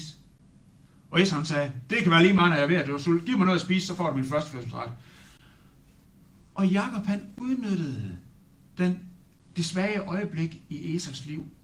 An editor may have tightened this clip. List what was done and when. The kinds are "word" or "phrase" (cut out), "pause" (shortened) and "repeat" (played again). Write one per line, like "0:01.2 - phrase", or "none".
none